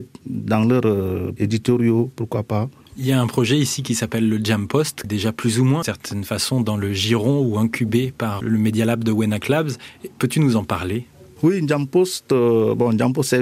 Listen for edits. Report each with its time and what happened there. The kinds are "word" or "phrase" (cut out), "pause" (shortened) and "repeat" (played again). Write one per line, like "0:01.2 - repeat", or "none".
0:01.4 - word
0:05.0 - word
0:05.8 - word
0:08.4 - word